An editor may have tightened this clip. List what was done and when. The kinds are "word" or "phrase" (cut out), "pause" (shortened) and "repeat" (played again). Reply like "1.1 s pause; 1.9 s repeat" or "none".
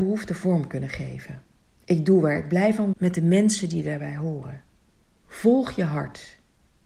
2.9 s word